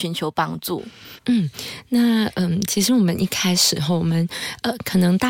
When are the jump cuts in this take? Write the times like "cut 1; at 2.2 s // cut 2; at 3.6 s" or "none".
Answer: cut 1; at 1.2 s